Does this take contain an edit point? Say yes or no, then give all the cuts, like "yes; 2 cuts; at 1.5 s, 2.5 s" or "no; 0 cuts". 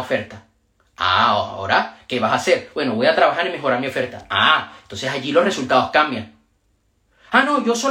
no; 0 cuts